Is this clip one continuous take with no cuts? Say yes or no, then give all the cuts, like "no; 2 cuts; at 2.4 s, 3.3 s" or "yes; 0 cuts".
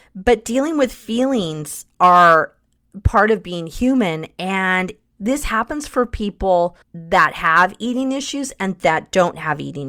no; 1 cut; at 6.8 s